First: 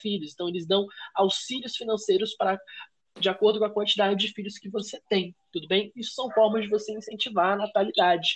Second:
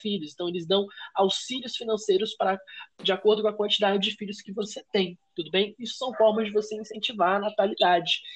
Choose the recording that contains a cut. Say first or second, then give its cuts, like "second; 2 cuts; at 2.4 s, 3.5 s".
second; 1 cut; at 2.9 s